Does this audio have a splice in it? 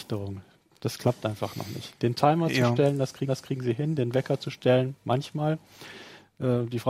yes; 1 cut; at 3.3 s

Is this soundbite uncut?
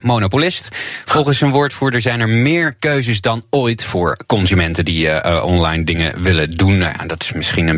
yes; 0 cuts

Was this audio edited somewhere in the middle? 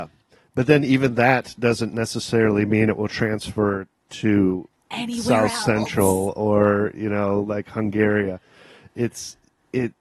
no; 0 cuts

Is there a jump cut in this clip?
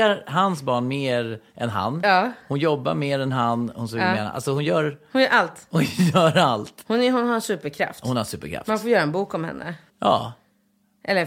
yes; 1 cut; at 9.9 s

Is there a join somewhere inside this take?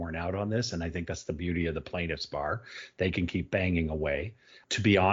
no; 0 cuts

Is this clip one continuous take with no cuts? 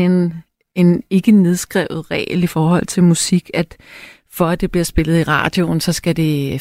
yes; 0 cuts

